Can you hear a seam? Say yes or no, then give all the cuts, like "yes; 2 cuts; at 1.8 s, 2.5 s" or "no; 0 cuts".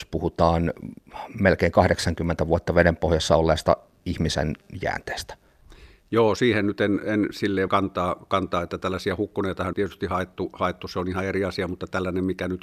yes; 2 cuts; at 7.7 s, 9.7 s